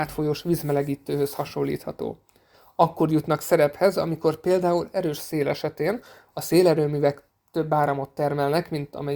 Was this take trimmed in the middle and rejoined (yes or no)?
no